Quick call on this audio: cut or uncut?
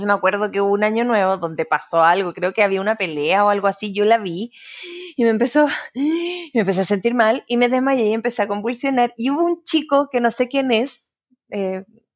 uncut